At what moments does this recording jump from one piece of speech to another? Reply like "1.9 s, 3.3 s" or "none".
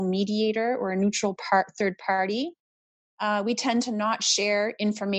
none

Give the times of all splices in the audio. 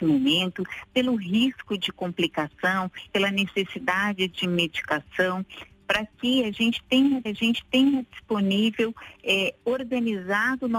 3.1 s, 7.3 s

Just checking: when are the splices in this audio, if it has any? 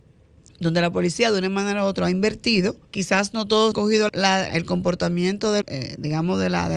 2.8 s, 3.7 s, 4.1 s, 4.5 s, 5.6 s

